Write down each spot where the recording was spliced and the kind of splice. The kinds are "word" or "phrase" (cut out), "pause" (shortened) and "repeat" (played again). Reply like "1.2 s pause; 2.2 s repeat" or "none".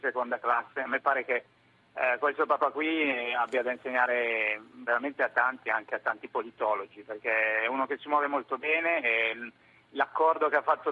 none